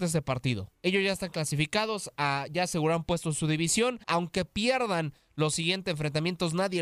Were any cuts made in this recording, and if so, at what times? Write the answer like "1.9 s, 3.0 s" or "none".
4.0 s